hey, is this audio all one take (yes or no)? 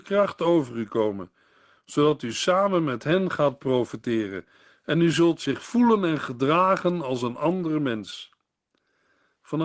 yes